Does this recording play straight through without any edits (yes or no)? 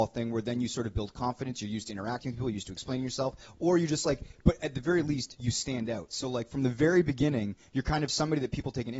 yes